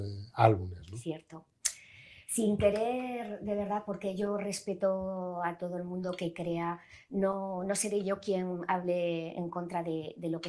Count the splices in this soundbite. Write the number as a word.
zero